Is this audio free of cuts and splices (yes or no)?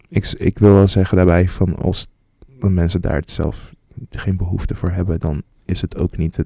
yes